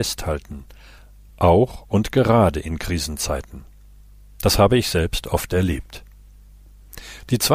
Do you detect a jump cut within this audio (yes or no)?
no